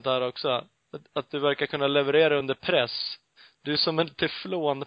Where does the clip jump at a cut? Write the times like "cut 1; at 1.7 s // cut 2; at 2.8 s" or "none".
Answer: none